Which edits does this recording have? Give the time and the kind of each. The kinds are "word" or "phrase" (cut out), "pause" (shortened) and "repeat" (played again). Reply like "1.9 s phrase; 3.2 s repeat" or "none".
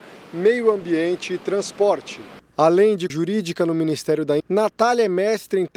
2.5 s pause; 3.1 s word; 4.4 s word